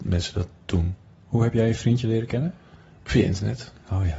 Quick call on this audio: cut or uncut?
uncut